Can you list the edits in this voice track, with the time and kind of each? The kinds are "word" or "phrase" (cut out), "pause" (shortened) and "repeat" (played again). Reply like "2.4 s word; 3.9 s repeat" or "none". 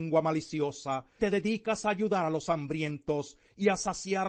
1.2 s word

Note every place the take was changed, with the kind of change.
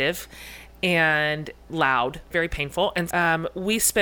1.7 s word; 2.3 s word; 3.1 s word

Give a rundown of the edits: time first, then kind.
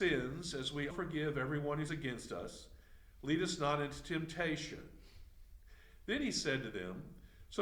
0.9 s word; 1.9 s word

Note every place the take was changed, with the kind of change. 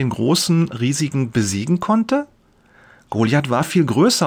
1.3 s word

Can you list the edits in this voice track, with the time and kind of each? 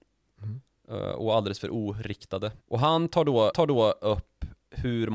2.6 s pause; 3.5 s repeat

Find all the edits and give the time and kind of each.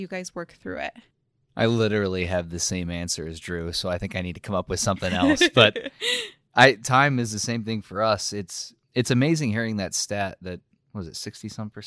1.1 s pause; 8.8 s pause

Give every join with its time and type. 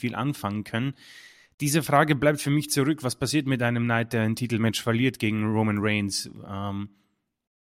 none

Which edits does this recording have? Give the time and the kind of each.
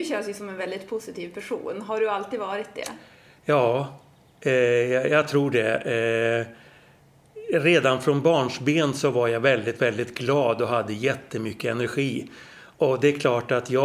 none

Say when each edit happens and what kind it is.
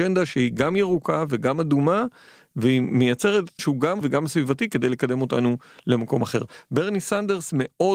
3.6 s word; 4.0 s word

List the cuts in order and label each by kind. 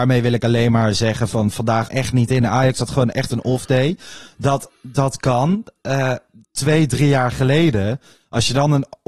1.9 s phrase

